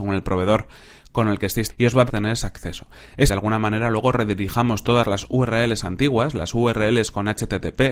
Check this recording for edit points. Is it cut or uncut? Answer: cut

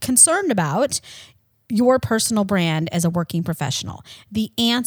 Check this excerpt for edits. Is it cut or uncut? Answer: uncut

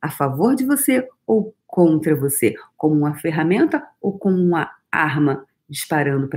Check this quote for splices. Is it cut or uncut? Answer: uncut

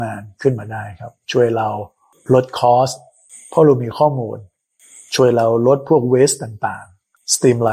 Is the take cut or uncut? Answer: uncut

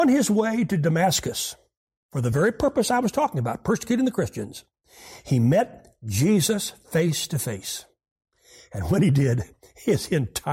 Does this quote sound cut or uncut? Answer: uncut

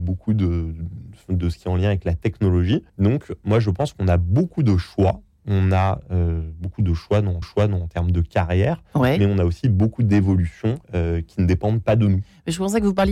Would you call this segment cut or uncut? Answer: cut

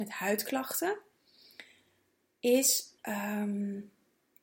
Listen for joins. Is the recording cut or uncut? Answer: cut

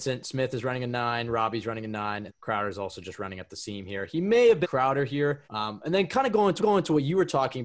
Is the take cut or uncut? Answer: cut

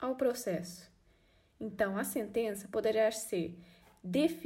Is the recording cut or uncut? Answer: uncut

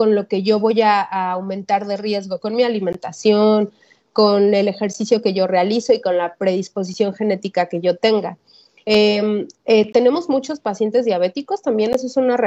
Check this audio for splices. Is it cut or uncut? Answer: uncut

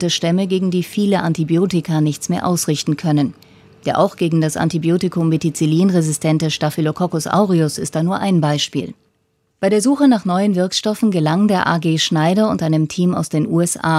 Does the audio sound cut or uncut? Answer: uncut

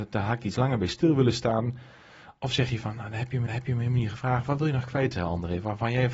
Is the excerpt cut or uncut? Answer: cut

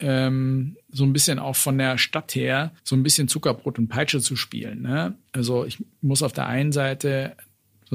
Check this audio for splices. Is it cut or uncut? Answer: cut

